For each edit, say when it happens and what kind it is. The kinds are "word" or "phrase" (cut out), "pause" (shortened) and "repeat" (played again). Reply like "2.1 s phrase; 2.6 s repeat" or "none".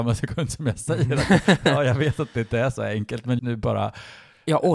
3.4 s word